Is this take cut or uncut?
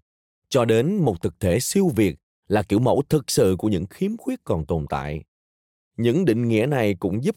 uncut